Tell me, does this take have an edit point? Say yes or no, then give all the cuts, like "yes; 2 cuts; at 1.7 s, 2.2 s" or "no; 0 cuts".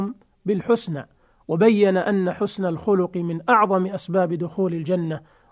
no; 0 cuts